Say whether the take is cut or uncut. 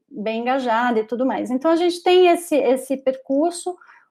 uncut